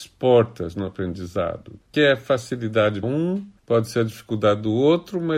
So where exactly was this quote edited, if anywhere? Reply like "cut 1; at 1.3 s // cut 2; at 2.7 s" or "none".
cut 1; at 1.9 s // cut 2; at 3.0 s // cut 3; at 3.6 s